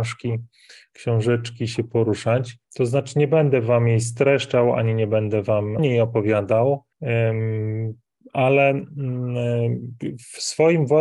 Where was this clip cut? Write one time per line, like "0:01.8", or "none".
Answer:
0:02.6
0:05.8
0:06.9